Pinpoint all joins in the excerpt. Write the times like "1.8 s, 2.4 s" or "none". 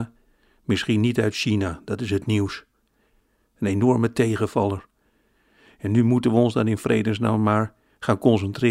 none